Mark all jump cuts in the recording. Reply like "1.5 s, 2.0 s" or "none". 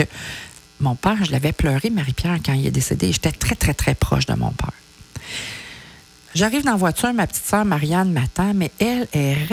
none